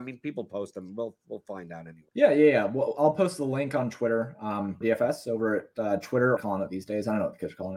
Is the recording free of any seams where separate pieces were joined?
no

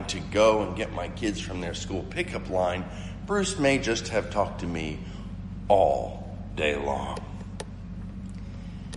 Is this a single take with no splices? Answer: yes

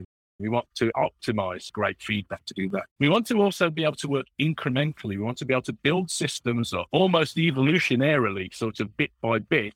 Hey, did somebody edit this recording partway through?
yes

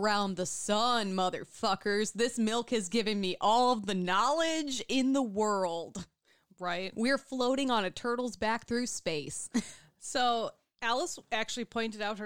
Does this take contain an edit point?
no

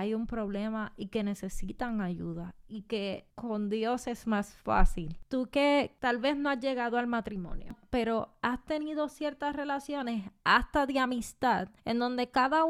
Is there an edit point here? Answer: yes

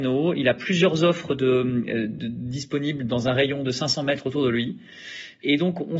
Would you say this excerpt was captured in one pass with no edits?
yes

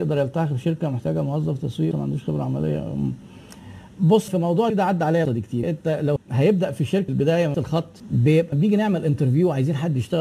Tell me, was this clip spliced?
yes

